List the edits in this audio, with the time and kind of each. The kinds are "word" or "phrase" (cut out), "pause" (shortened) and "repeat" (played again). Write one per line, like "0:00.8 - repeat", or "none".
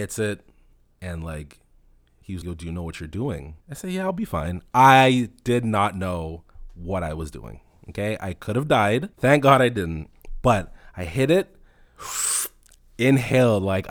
0:02.4 - word
0:03.6 - pause
0:09.1 - pause